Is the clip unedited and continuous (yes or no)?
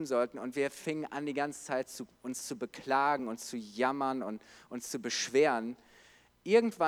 yes